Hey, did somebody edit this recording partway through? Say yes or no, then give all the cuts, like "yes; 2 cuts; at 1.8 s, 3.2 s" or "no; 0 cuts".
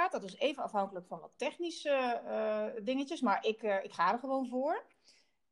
no; 0 cuts